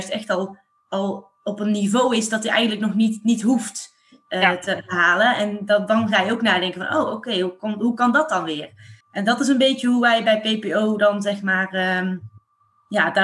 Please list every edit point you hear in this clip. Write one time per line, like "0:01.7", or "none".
0:09.0